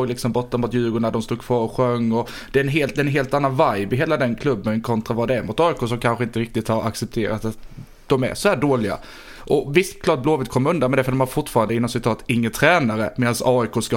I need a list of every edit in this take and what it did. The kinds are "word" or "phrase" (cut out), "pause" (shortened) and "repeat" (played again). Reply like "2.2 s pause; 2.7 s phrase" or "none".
none